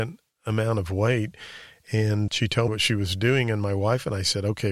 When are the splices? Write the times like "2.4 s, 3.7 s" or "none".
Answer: 2.3 s, 2.7 s